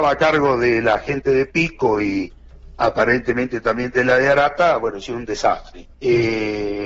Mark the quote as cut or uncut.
cut